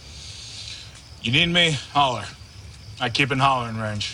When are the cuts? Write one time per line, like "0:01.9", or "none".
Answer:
none